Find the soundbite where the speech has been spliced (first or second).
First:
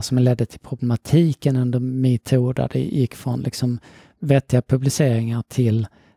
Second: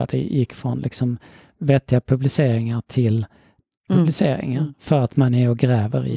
second